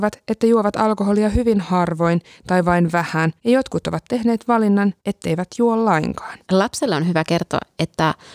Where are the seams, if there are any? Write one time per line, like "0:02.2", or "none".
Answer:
0:03.4
0:05.0
0:06.4